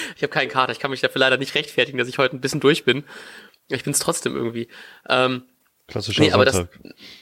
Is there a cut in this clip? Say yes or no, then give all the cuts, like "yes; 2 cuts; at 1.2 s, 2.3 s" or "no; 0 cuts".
no; 0 cuts